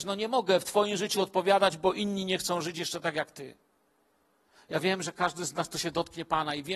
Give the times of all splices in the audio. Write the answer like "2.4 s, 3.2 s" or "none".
none